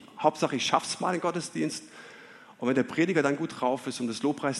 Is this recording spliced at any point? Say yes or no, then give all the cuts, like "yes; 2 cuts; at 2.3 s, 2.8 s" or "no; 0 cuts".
no; 0 cuts